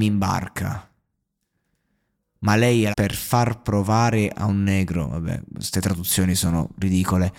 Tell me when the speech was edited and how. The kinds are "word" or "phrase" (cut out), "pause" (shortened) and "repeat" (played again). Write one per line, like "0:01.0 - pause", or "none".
0:02.9 - phrase